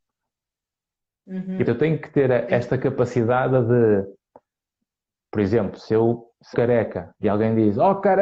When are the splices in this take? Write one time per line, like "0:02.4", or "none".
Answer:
0:01.6
0:06.5